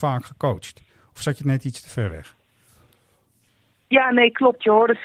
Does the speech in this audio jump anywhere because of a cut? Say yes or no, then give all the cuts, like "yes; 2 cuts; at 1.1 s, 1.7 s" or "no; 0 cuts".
no; 0 cuts